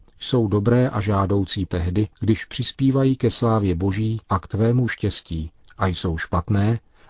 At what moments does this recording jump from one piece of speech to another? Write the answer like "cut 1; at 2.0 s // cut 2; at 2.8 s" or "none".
cut 1; at 1.7 s // cut 2; at 2.1 s // cut 3; at 4.2 s // cut 4; at 4.9 s // cut 5; at 5.7 s

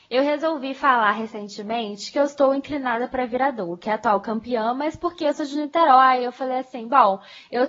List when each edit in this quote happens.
none

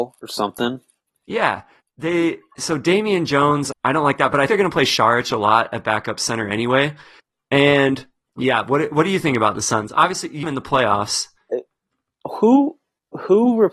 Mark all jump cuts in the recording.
cut 1; at 3.7 s // cut 2; at 4.5 s // cut 3; at 8.3 s // cut 4; at 10.4 s

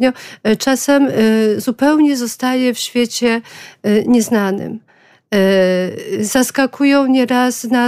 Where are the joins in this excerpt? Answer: none

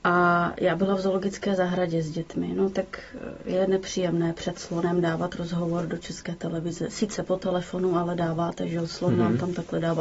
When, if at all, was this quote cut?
none

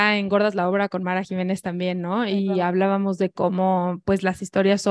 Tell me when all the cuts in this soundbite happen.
none

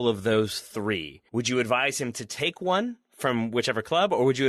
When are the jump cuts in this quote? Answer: cut 1; at 1.3 s

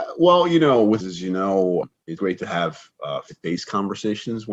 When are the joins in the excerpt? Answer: cut 1; at 1.0 s // cut 2; at 2.2 s // cut 3; at 3.3 s

